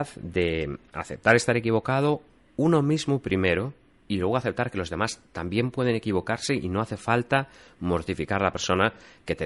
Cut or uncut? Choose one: uncut